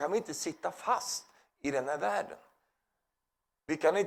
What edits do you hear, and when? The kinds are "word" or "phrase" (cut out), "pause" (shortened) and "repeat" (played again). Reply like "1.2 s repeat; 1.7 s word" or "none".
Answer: none